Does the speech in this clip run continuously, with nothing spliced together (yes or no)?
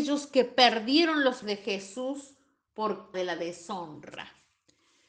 no